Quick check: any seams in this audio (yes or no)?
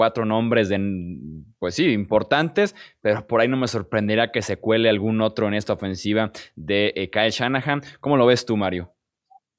no